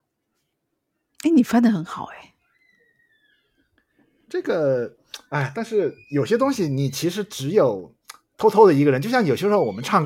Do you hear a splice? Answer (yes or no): no